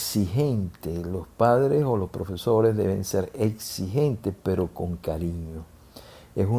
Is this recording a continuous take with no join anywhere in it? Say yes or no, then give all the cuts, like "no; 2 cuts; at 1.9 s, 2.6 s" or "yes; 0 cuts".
yes; 0 cuts